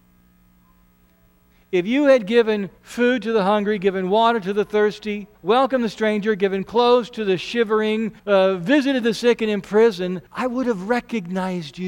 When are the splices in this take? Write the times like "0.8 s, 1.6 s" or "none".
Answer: 2.8 s, 5.3 s, 8.2 s, 10.3 s